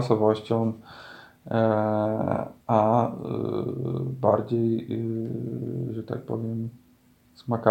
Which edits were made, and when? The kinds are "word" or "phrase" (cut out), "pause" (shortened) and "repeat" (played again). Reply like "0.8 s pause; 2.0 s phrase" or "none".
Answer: 2.6 s pause